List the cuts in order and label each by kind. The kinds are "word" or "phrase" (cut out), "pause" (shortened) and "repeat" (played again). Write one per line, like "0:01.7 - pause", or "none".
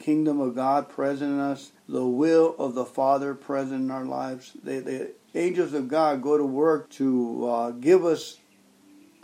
0:01.8 - pause
0:06.9 - word